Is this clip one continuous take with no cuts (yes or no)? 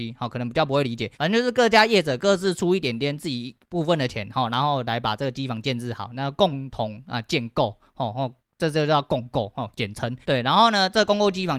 no